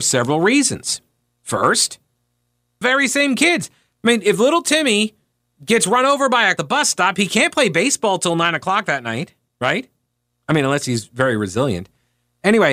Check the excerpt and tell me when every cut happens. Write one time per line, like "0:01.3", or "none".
0:02.8
0:06.6